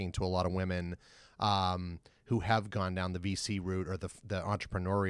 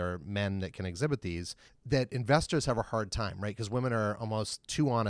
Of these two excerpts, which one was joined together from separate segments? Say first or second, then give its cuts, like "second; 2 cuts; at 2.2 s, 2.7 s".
second; 1 cut; at 1.7 s